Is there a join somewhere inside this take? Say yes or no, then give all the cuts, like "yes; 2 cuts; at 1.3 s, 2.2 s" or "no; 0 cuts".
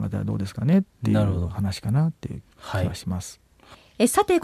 yes; 1 cut; at 2.5 s